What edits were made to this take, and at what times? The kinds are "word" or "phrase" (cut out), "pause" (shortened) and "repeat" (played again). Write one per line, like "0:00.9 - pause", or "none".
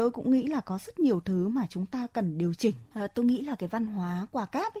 none